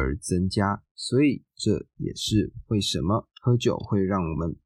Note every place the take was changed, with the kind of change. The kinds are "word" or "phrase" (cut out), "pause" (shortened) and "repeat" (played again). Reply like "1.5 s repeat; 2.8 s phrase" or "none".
3.3 s pause